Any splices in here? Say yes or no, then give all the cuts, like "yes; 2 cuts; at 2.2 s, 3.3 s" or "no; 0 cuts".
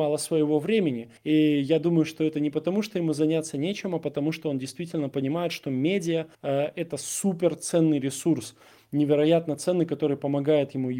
yes; 2 cuts; at 1.2 s, 6.3 s